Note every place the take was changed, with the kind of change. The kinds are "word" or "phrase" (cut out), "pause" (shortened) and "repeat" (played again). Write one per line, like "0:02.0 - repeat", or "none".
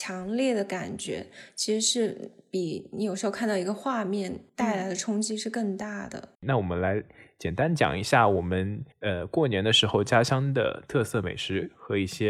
0:04.5 - pause
0:06.3 - pause
0:08.9 - pause